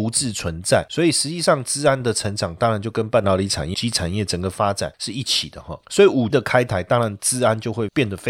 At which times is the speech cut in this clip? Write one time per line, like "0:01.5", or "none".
0:03.7
0:06.3